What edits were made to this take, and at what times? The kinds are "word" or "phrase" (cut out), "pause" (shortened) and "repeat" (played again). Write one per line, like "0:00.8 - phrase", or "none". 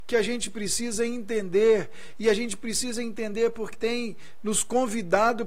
0:03.7 - word

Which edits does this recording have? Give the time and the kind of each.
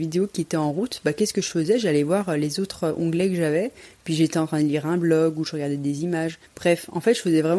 0:06.4 - pause

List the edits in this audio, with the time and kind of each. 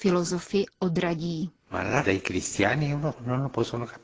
0:02.0 - word
0:03.1 - word

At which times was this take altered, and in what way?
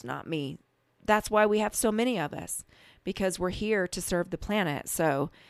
none

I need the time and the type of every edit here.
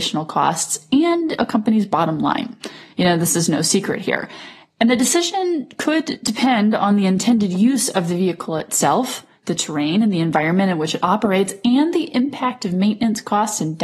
none

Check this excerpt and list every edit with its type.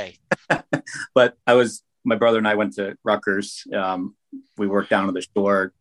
0:01.4 - pause

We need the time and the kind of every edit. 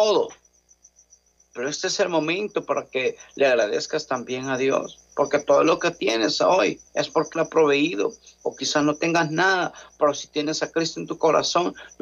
0:06.9 - pause
0:07.3 - word

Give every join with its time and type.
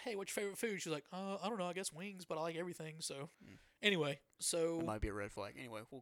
0:03.3 - pause

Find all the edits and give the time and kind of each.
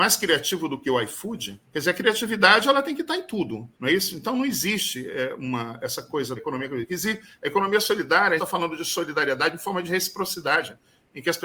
0:01.6 - pause
0:03.7 - pause
0:06.4 - word
0:08.4 - phrase

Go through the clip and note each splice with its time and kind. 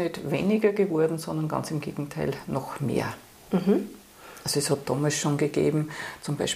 none

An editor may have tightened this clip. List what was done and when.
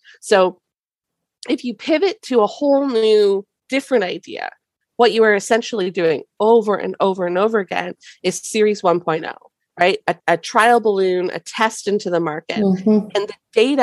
0:10.2 - pause

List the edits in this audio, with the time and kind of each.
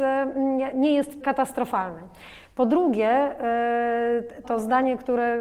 0:01.2 - word
0:04.4 - phrase

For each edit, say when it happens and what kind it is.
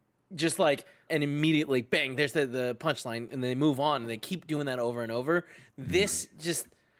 0:01.1 - phrase

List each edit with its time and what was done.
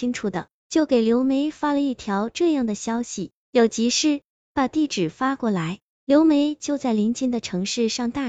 0:04.4 - phrase

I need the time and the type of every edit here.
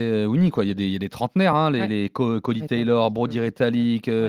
none

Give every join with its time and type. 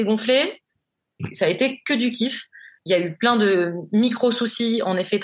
none

